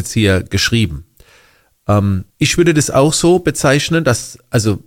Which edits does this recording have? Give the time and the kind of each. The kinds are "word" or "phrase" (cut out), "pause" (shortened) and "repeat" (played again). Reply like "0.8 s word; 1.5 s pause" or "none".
2.3 s pause